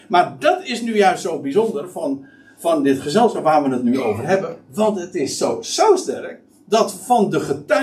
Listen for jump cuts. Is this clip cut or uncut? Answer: uncut